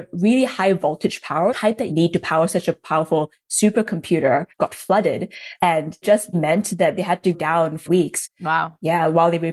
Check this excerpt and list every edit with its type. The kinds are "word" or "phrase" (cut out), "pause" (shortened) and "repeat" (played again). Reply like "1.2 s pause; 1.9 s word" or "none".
1.5 s word; 1.9 s word; 4.5 s pause; 6.0 s word; 6.3 s word; 7.3 s word; 7.9 s phrase